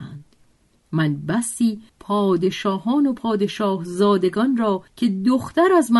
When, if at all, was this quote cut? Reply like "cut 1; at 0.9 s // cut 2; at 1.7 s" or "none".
cut 1; at 1.9 s // cut 2; at 4.9 s